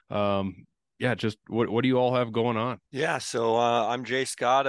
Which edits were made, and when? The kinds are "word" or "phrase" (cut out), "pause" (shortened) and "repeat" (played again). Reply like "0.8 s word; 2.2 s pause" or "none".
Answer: 2.9 s pause